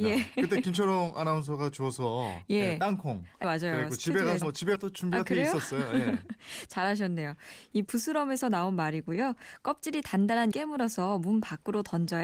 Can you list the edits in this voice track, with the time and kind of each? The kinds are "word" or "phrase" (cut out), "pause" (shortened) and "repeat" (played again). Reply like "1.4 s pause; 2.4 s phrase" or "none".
3.4 s word; 4.4 s word; 4.8 s word; 7.9 s word; 10.5 s word